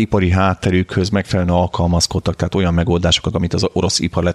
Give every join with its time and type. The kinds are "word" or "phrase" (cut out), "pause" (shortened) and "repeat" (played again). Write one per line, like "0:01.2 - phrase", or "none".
0:03.3 - word